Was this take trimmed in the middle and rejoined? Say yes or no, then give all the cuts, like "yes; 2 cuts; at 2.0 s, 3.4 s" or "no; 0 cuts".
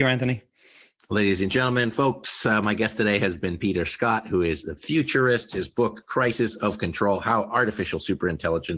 no; 0 cuts